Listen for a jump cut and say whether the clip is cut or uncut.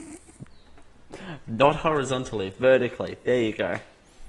uncut